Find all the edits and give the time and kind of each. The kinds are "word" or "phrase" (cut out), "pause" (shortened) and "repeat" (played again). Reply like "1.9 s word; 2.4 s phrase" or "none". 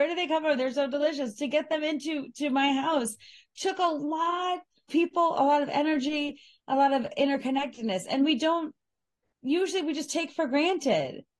4.9 s word